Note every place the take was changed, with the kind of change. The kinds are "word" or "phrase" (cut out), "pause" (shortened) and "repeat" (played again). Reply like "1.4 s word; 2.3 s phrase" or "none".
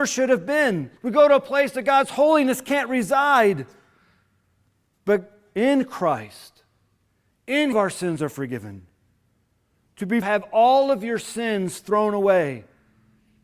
1.0 s pause; 7.7 s phrase; 10.2 s phrase